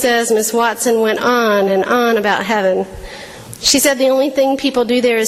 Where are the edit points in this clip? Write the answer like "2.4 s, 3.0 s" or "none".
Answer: none